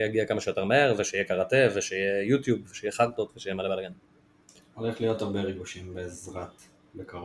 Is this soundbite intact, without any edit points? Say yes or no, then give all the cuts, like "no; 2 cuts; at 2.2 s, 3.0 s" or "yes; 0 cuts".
yes; 0 cuts